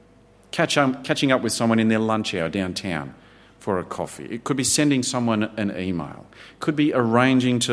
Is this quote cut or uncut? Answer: uncut